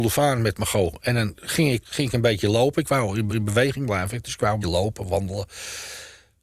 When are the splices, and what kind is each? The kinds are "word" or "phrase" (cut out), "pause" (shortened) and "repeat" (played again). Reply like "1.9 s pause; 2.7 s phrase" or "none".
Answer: 1.8 s phrase; 3.3 s repeat; 4.6 s word